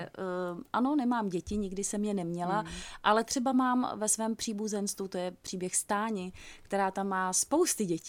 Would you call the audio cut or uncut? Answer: uncut